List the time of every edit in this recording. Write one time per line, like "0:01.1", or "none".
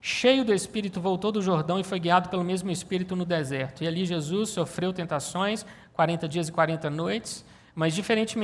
0:00.9

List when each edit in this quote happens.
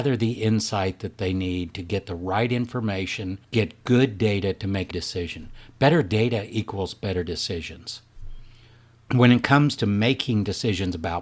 0:03.4
0:04.9

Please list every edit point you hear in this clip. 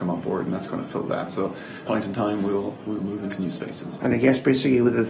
0:01.9
0:03.0

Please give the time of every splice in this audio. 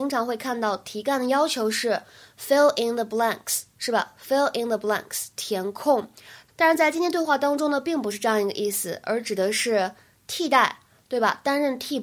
none

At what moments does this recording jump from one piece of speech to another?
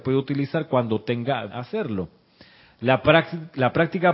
0:01.5

